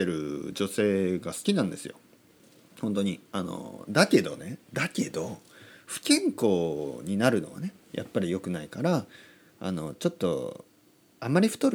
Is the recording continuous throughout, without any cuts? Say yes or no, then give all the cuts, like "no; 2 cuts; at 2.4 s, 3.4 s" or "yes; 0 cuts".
yes; 0 cuts